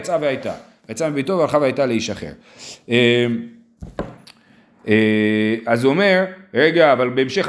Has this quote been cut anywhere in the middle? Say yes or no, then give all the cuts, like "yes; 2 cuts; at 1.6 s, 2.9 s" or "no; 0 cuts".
no; 0 cuts